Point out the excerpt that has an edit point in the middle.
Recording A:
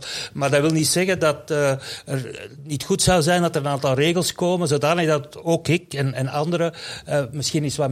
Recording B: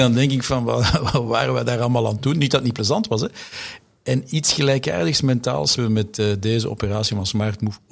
B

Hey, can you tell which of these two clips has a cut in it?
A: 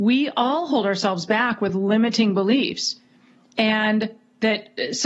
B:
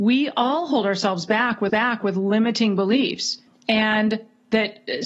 B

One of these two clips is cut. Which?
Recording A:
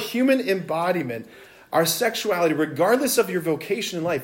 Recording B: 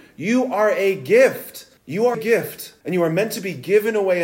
B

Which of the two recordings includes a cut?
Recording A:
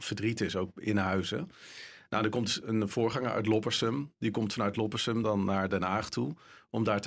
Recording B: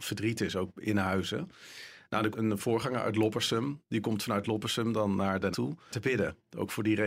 B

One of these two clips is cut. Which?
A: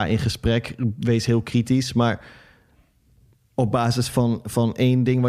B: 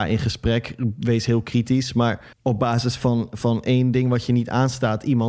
B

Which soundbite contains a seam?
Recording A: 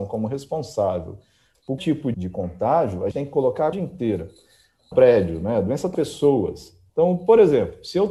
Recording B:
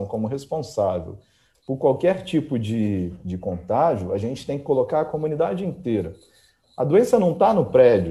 A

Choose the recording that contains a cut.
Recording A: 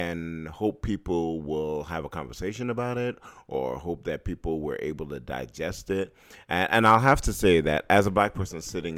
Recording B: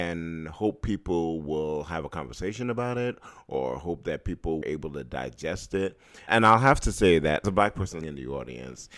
B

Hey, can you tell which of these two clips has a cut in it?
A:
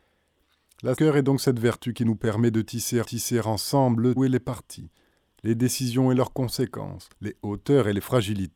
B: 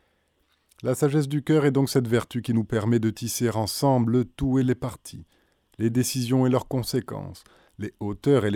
A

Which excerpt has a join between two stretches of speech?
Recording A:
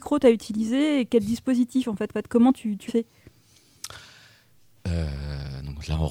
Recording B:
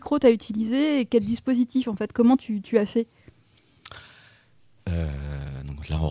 A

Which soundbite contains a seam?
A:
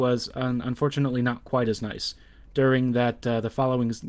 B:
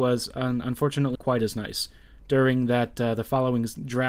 B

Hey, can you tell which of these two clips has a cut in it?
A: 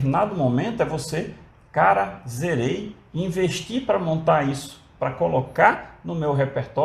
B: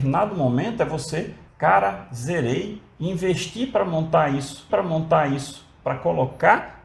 B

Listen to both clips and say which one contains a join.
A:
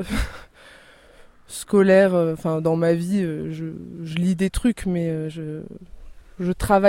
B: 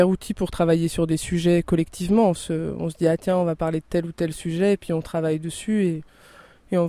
B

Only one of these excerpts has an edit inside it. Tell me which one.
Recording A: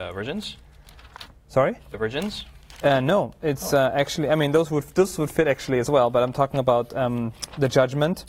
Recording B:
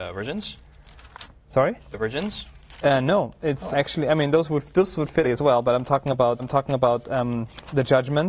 B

